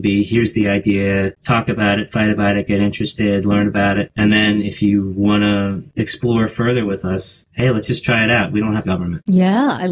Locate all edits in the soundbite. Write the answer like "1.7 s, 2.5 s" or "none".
8.8 s